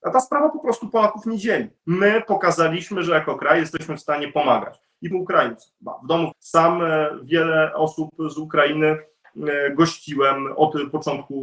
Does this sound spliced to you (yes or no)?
yes